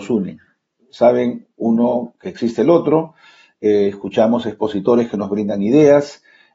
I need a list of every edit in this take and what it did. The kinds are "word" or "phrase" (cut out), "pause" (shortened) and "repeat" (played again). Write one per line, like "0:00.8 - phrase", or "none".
none

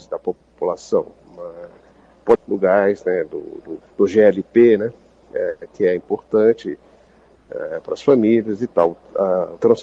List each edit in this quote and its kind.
0:01.1 - pause
0:02.3 - phrase
0:03.9 - pause

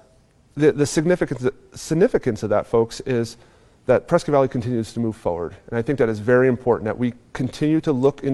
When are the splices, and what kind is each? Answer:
none

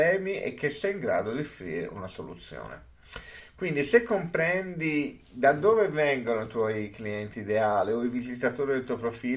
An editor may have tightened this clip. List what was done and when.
none

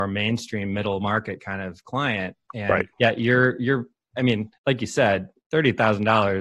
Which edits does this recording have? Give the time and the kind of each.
0:02.9 - pause
0:04.6 - pause

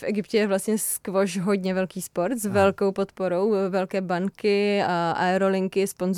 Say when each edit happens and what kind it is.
none

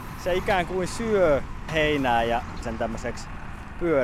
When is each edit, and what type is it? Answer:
0:01.7 - word
0:02.6 - word

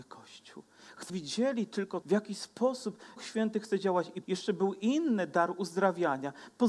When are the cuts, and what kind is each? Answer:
0:01.1 - word
0:02.0 - word
0:03.2 - word
0:04.2 - word

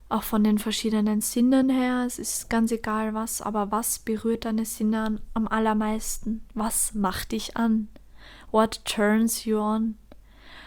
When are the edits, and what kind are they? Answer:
none

